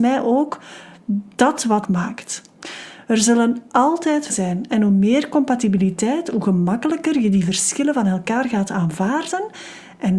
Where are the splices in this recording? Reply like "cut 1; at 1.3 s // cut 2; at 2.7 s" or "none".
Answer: cut 1; at 1.8 s // cut 2; at 4.3 s